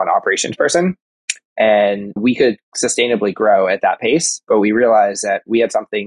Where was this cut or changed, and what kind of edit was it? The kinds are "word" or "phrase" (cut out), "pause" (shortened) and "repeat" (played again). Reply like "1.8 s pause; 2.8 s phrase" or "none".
2.2 s word

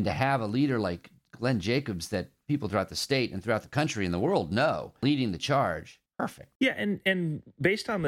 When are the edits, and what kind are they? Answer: 6.1 s pause

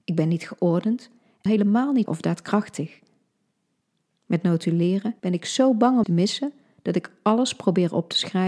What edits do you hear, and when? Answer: 1.5 s phrase; 2.1 s word; 5.2 s pause; 6.0 s word

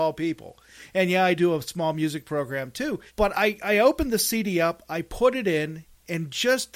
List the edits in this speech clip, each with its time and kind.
1.3 s word; 3.1 s pause

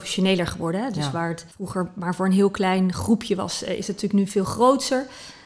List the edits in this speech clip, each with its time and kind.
1.5 s pause

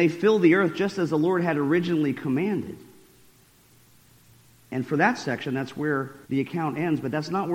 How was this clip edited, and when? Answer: 6.2 s pause

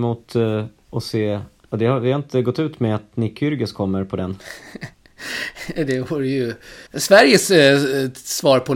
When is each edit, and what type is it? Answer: 4.9 s pause; 6.9 s pause

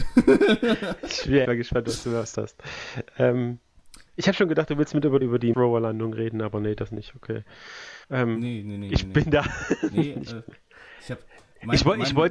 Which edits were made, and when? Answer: 1.4 s word; 2.3 s word; 5.2 s word; 5.5 s word; 8.0 s pause

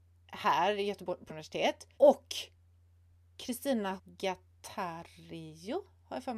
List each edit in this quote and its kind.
1.3 s word; 1.9 s pause; 4.0 s word

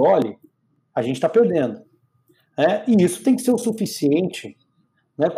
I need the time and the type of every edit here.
none

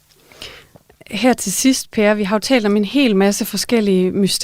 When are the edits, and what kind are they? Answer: none

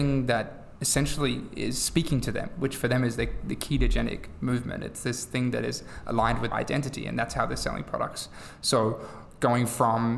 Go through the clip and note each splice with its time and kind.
6.5 s word

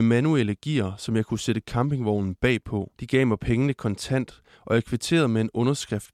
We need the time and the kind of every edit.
3.0 s pause

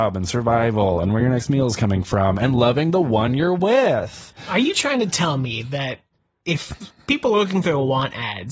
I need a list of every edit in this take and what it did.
none

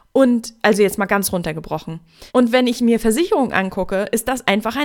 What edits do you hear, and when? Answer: 2.3 s pause

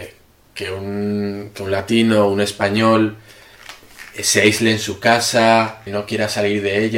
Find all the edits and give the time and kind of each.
5.9 s word

